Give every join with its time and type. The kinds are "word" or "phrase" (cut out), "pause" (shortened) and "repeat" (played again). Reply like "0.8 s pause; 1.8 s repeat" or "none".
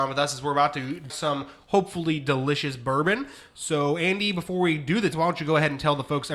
1.1 s word; 5.1 s word